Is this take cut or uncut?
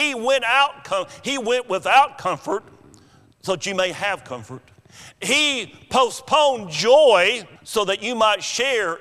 cut